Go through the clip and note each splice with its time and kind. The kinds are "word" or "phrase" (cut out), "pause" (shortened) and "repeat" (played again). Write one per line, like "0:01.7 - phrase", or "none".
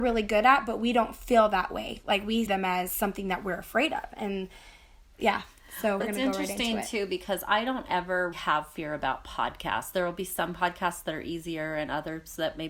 0:02.5 - word
0:06.0 - word
0:08.3 - word